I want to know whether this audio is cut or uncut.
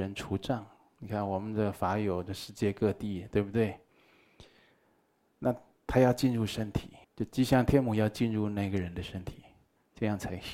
cut